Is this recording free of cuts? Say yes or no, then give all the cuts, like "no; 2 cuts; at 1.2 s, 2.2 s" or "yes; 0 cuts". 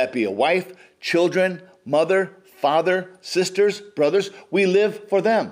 yes; 0 cuts